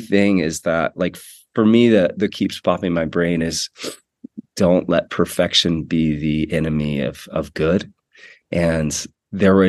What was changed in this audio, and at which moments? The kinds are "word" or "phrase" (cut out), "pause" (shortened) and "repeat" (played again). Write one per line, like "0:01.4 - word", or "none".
0:02.3 - phrase